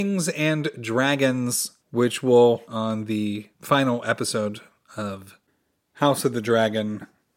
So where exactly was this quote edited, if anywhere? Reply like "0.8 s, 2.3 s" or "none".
1.8 s, 2.7 s, 3.5 s